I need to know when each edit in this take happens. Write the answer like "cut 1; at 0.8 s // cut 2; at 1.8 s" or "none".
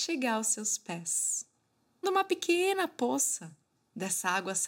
cut 1; at 2.0 s